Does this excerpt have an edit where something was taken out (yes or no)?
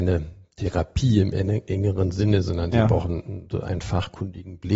no